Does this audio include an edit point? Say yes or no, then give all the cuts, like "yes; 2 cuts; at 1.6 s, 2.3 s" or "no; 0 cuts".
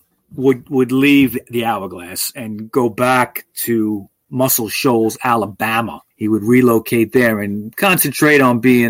yes; 2 cuts; at 4.1 s, 6.1 s